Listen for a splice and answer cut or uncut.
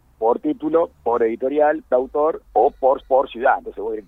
cut